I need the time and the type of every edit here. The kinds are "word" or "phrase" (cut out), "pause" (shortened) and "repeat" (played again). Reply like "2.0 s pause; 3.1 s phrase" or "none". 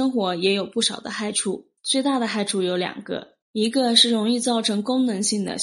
1.8 s pause; 3.4 s pause